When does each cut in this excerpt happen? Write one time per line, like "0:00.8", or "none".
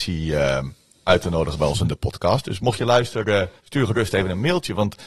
0:03.6